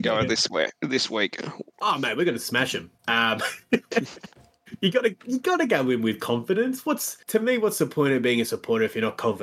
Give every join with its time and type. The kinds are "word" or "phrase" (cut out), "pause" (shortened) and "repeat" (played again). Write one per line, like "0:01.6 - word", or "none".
0:03.0 - pause
0:07.2 - pause